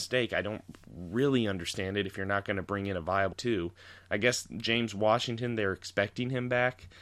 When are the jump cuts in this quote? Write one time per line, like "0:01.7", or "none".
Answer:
0:03.3